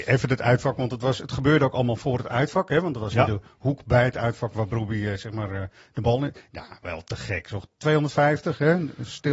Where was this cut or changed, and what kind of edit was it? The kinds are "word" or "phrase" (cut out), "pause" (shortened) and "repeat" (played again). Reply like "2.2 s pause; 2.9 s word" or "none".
none